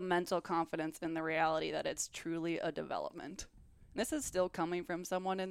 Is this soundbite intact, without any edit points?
yes; 0 cuts

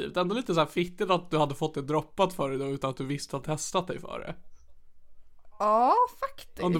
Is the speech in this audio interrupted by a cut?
yes; 1 cut; at 3.4 s

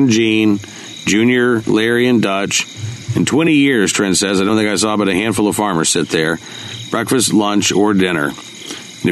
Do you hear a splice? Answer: no; 0 cuts

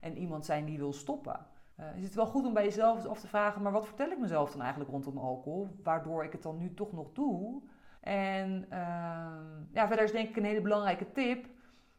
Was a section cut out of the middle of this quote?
yes; 2 cuts; at 1.7 s, 8.0 s

